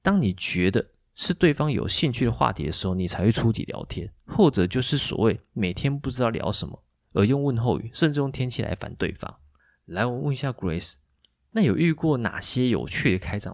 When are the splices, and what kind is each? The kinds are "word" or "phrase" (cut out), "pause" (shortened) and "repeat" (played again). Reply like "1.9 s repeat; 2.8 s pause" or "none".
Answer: none